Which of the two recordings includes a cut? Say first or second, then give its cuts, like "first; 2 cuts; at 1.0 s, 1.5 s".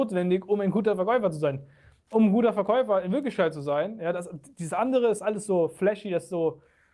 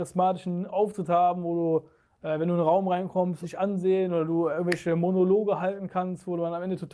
second; 2 cuts; at 2.0 s, 3.4 s